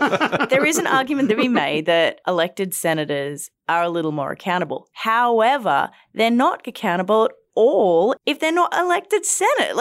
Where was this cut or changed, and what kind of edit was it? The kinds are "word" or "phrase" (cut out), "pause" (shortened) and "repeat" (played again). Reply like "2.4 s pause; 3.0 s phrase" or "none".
1.3 s word; 3.6 s pause